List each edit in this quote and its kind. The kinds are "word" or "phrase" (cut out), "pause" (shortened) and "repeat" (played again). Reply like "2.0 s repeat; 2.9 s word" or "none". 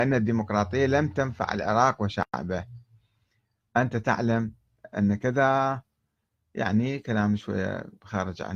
none